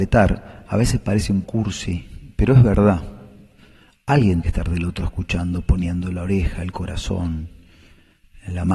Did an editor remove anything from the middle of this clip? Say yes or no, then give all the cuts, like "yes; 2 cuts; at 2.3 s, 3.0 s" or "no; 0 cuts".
yes; 3 cuts; at 1.4 s, 4.4 s, 5.0 s